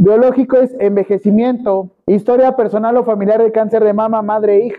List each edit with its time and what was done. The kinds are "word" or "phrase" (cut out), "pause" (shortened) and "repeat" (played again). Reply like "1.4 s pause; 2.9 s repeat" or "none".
2.0 s pause